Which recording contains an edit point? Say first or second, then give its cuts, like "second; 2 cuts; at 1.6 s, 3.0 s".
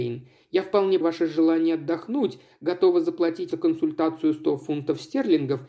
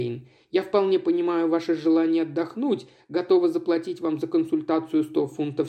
first; 2 cuts; at 1.0 s, 3.5 s